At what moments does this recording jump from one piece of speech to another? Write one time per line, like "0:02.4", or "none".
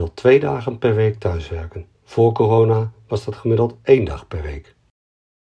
0:01.9

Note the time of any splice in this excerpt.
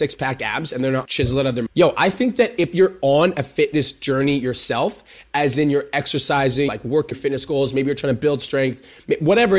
0:01.1
0:01.7
0:06.7
0:07.1

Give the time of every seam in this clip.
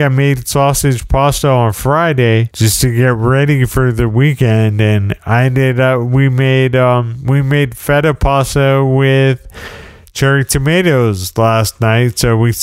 none

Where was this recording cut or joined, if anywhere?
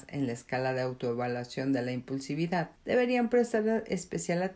0:02.8

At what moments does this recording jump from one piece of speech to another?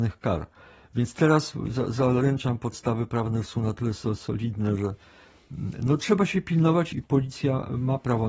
0:06.9

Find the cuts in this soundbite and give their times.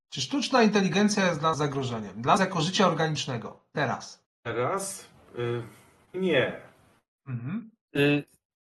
0:01.5
0:02.4
0:06.1

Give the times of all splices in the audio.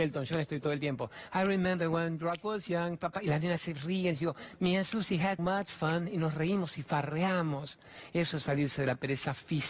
0:05.4

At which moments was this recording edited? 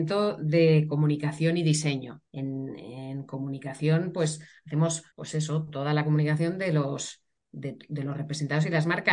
0:02.3
0:05.1

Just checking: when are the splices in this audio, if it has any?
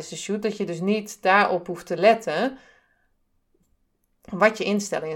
none

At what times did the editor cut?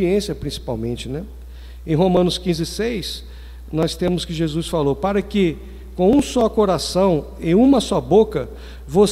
none

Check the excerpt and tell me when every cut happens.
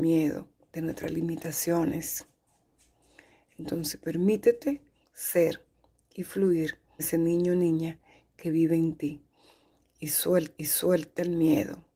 0:07.0
0:10.6

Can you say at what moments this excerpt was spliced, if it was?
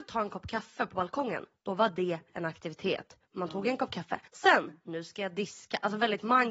0:04.3

